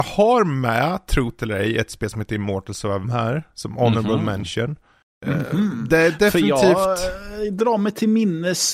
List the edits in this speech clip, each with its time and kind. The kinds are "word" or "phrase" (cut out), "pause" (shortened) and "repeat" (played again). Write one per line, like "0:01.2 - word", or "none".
0:03.0 - word
0:05.0 - pause